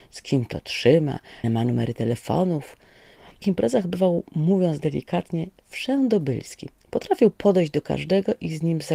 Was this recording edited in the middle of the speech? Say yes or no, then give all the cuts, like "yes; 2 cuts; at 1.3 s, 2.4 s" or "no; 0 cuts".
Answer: yes; 2 cuts; at 1.4 s, 3.4 s